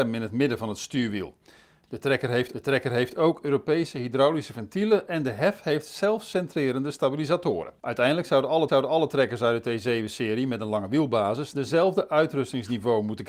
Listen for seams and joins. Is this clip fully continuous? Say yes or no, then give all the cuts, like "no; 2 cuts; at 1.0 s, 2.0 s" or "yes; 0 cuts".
no; 3 cuts; at 2.5 s, 7.8 s, 8.7 s